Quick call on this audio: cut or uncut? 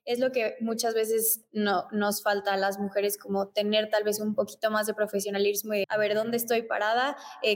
cut